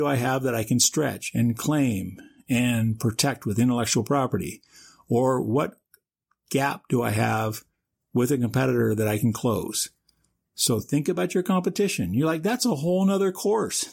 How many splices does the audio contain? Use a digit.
0